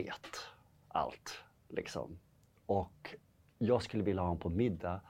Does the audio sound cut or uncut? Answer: uncut